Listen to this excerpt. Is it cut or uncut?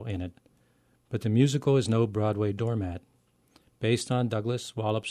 uncut